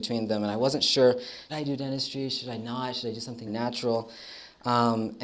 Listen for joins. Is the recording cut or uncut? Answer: cut